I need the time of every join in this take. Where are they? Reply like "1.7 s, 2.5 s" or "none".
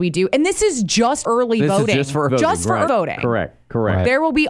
1.2 s, 2.3 s, 2.9 s